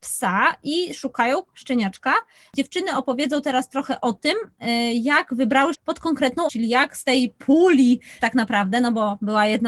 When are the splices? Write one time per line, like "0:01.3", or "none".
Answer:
0:01.5
0:05.7
0:06.5
0:08.2